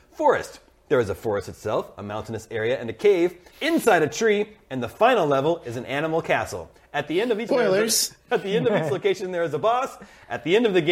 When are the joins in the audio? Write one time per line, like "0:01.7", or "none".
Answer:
0:03.5
0:07.5